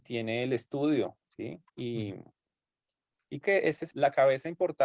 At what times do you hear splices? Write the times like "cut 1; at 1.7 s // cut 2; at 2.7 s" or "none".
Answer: cut 1; at 1.7 s // cut 2; at 3.4 s // cut 3; at 3.9 s